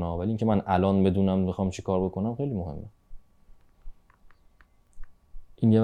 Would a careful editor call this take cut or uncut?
uncut